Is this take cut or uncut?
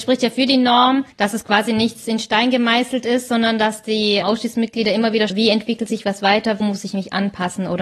cut